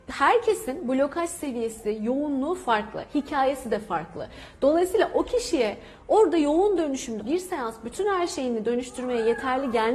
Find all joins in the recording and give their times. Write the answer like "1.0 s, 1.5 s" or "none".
7.2 s